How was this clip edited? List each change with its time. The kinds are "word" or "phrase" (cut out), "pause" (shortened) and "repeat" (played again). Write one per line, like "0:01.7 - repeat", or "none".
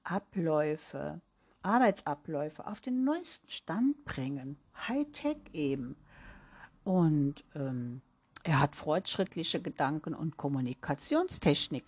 none